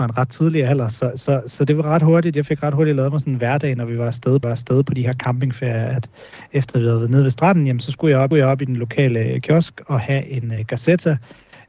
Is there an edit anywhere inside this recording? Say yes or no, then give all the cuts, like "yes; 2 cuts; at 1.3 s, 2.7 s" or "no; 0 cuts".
yes; 2 cuts; at 4.4 s, 8.3 s